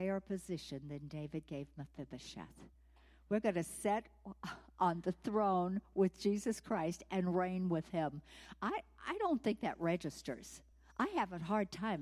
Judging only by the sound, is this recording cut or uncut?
uncut